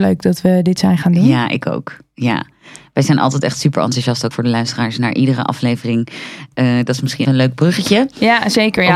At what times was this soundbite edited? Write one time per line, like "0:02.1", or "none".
0:04.3
0:07.2